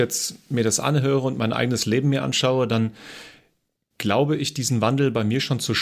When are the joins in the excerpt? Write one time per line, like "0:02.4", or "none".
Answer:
none